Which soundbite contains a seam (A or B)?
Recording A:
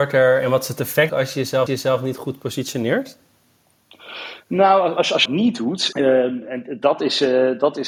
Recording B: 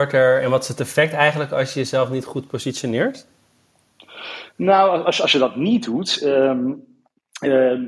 A